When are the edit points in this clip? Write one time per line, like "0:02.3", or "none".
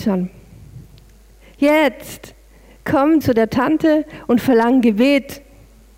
0:03.2